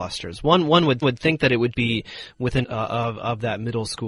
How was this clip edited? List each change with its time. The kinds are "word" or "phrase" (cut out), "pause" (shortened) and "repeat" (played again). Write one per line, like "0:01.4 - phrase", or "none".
0:01.0 - repeat
0:01.7 - word
0:02.6 - phrase